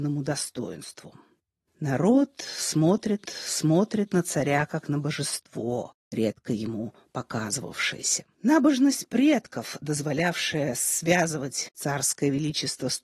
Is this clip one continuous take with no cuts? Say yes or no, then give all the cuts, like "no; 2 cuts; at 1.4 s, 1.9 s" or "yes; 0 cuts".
no; 3 cuts; at 3.2 s, 6.0 s, 8.3 s